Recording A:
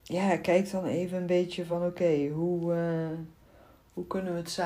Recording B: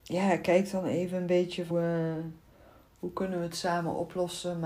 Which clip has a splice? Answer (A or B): B